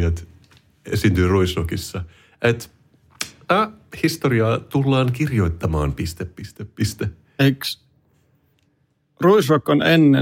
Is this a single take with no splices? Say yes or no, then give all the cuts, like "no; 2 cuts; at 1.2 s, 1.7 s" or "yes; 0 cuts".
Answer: yes; 0 cuts